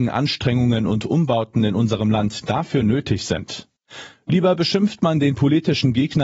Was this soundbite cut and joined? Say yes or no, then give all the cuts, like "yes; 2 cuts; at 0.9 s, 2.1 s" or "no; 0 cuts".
no; 0 cuts